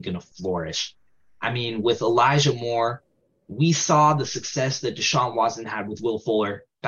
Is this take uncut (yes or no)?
yes